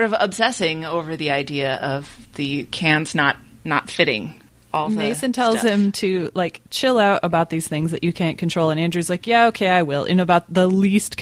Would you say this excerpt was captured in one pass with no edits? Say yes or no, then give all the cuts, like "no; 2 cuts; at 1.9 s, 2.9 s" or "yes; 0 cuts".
yes; 0 cuts